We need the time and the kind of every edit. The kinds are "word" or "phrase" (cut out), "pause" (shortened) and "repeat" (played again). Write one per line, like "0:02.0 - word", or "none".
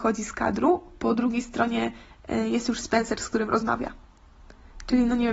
none

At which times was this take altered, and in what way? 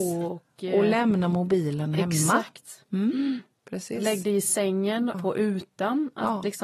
0:05.1 - word

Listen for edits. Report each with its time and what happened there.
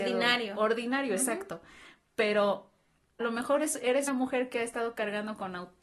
0:03.2 - word
0:04.1 - word

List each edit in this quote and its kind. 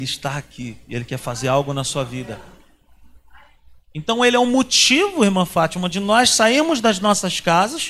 none

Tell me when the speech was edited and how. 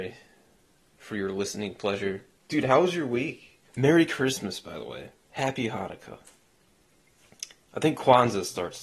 0:03.7 - pause

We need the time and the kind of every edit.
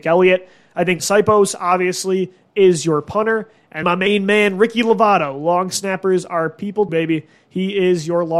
0:01.0 - word
0:03.8 - word
0:06.9 - word

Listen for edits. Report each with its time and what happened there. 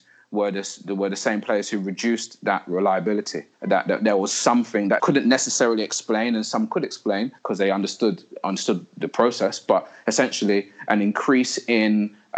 0:03.5 - pause
0:05.0 - word
0:07.4 - pause

